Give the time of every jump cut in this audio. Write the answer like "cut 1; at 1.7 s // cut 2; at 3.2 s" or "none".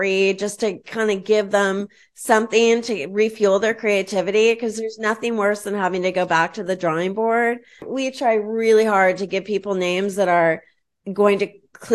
none